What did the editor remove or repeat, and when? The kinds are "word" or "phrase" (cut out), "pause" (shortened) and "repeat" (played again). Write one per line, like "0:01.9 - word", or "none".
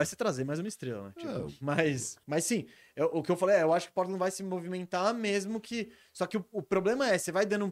0:02.2 - pause